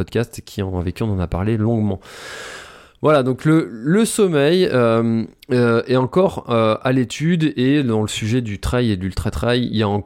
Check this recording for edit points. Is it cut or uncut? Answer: uncut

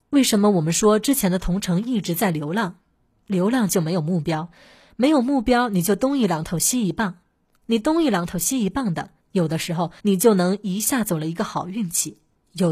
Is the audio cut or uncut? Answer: cut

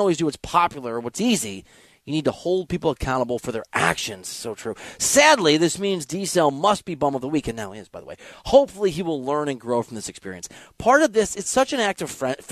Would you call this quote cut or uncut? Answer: uncut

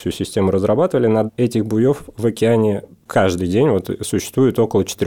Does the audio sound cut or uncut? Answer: cut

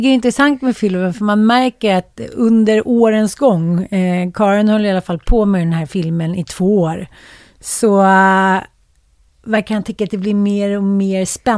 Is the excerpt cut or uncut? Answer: uncut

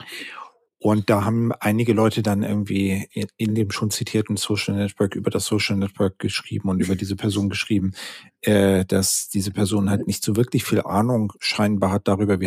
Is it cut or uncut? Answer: uncut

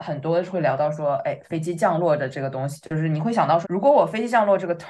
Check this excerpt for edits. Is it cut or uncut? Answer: cut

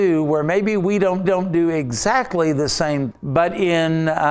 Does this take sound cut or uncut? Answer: cut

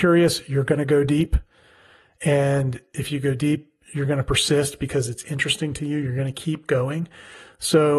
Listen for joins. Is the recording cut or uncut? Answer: uncut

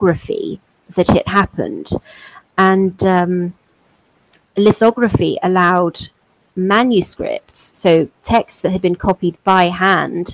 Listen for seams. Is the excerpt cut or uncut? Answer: uncut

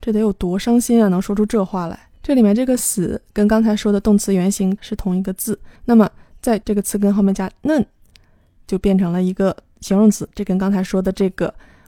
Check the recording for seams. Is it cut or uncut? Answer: cut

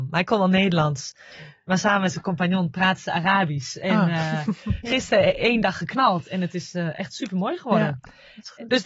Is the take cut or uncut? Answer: uncut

